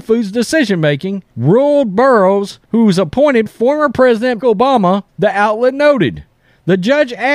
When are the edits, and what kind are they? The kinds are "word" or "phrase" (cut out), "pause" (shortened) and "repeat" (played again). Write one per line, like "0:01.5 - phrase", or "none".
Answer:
0:01.3 - pause
0:02.6 - pause
0:03.5 - word
0:04.4 - word
0:05.1 - pause